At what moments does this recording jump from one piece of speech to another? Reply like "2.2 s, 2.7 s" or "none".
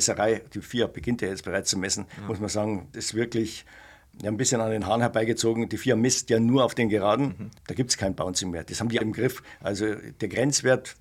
2.9 s, 7.6 s, 9.0 s